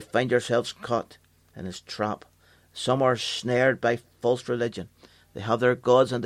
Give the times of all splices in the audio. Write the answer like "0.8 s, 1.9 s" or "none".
none